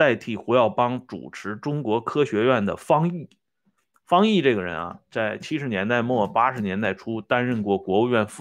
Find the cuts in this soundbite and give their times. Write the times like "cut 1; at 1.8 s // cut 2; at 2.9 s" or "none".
none